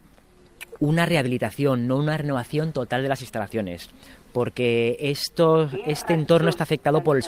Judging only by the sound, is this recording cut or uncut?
uncut